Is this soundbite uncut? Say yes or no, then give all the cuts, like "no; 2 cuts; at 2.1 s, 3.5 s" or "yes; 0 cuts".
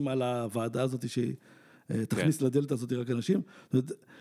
yes; 0 cuts